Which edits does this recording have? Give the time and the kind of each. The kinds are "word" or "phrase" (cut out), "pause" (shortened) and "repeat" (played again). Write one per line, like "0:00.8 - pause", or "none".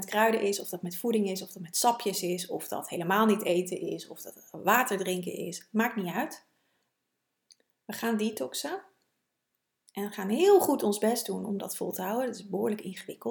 none